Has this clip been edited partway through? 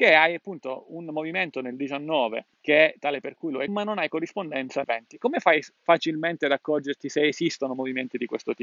yes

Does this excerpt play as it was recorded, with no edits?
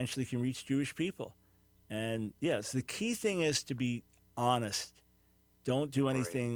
yes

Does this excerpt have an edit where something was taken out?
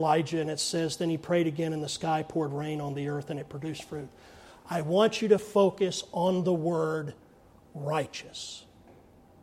no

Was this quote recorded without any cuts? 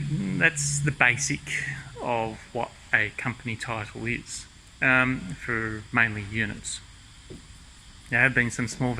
yes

